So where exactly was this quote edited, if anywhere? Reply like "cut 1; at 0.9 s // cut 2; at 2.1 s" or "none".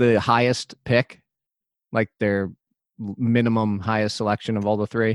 none